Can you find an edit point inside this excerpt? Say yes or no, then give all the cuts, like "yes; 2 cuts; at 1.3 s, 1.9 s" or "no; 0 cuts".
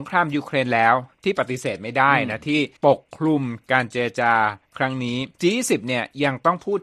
yes; 2 cuts; at 2.8 s, 5.3 s